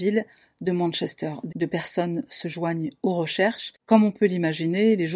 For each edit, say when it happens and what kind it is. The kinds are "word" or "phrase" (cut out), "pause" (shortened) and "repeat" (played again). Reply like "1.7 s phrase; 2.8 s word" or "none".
1.5 s word